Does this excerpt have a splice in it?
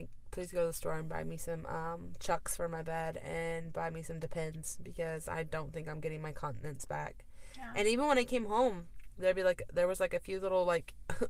no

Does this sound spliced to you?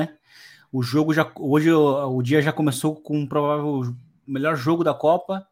no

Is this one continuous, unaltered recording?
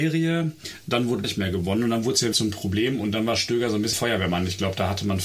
no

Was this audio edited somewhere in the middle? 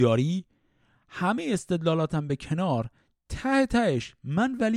no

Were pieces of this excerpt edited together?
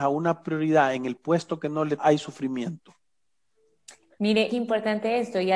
yes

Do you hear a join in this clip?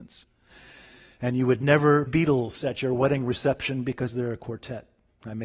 yes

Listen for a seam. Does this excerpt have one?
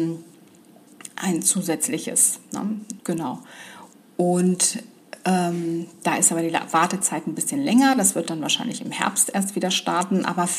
yes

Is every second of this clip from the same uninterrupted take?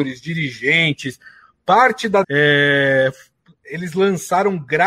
no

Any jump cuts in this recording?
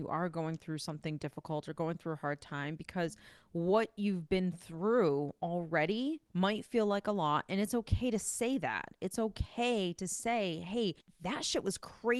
yes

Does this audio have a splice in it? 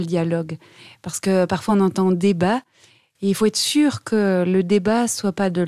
no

